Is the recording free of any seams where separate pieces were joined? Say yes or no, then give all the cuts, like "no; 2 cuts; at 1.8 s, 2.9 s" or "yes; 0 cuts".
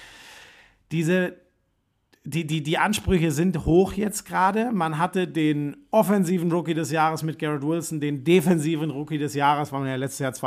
yes; 0 cuts